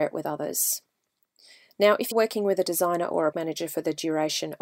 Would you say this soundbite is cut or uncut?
cut